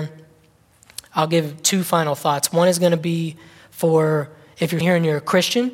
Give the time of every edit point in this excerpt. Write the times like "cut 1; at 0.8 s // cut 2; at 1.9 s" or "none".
cut 1; at 4.8 s